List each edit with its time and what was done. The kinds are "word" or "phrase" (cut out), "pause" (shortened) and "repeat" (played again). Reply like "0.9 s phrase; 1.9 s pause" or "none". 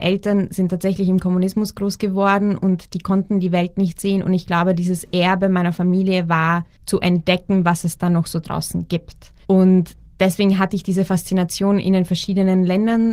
9.4 s pause